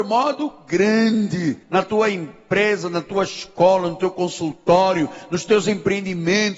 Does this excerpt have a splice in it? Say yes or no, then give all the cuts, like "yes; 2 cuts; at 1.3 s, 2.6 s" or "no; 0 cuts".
yes; 1 cut; at 1.6 s